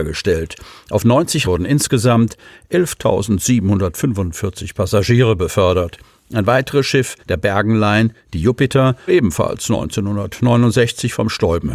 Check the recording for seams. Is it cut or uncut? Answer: cut